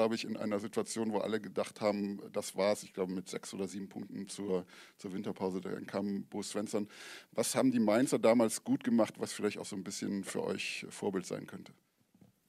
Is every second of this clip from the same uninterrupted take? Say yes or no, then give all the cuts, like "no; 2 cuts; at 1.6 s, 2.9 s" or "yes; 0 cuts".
yes; 0 cuts